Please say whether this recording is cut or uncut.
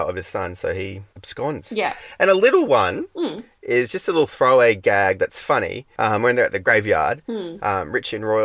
uncut